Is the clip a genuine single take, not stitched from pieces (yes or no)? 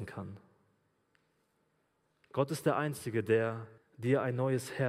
no